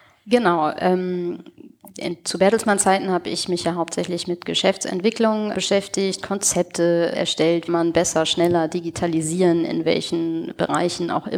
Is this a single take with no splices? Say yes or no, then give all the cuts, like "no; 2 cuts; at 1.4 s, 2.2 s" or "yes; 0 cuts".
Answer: no; 3 cuts; at 5.5 s, 7.1 s, 7.7 s